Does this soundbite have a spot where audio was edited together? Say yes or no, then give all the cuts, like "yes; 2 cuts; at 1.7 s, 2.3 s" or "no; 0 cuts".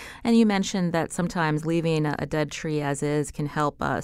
no; 0 cuts